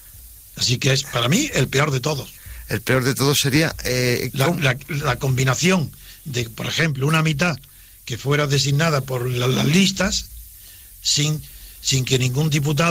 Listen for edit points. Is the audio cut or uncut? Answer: uncut